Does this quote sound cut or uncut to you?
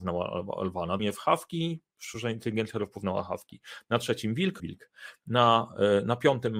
cut